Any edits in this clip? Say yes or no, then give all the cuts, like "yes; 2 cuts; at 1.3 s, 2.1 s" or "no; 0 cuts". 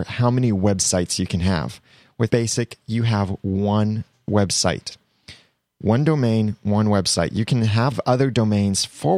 yes; 2 cuts; at 2.3 s, 7.9 s